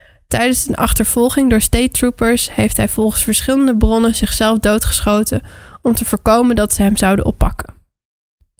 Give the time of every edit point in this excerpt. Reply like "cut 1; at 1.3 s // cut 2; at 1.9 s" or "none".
none

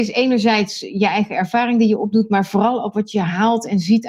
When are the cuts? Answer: none

